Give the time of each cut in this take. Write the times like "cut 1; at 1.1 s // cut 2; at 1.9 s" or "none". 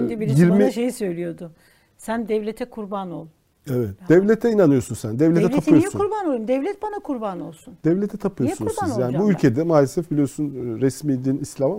none